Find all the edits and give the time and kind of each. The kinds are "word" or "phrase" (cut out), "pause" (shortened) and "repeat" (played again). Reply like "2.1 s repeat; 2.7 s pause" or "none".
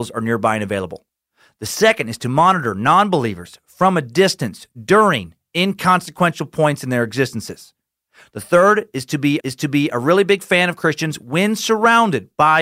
9.4 s repeat